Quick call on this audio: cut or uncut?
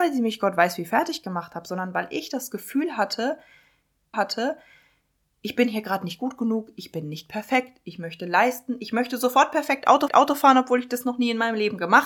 cut